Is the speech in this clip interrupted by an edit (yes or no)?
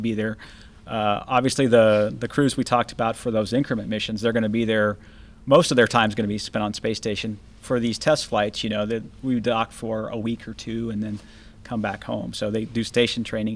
no